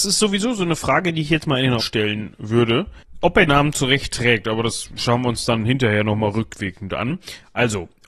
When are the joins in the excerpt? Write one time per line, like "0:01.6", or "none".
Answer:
0:01.8
0:03.5